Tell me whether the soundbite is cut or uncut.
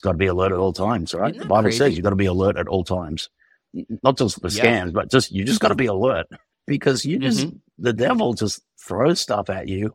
cut